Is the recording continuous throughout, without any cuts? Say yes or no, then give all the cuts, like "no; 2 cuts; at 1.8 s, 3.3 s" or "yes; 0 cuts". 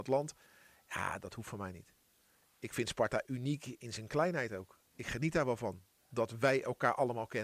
no; 1 cut; at 4.9 s